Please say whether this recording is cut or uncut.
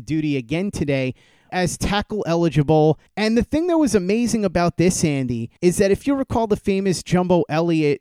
cut